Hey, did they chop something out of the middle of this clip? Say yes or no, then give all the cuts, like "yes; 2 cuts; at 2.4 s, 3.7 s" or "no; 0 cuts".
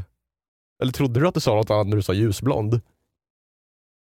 no; 0 cuts